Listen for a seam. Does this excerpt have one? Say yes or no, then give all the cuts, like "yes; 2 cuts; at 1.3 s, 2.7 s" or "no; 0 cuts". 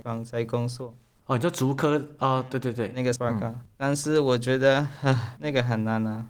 yes; 2 cuts; at 3.2 s, 5.4 s